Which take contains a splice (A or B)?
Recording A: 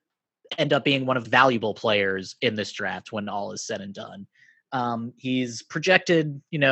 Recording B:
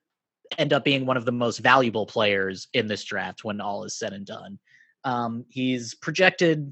A